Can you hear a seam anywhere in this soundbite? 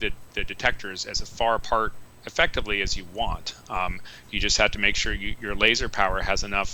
no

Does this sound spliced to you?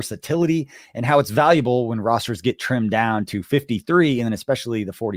no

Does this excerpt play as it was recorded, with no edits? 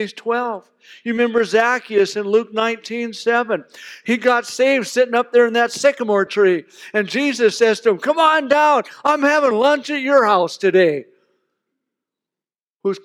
yes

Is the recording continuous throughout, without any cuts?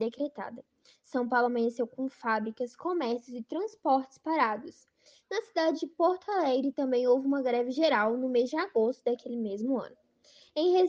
yes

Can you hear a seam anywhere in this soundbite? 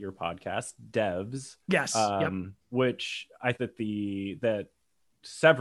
yes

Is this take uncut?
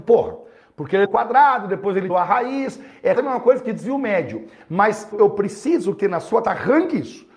no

